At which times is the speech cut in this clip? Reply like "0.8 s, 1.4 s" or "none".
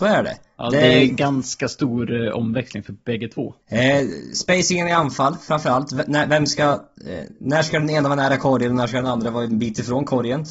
1.1 s, 3.6 s, 7.3 s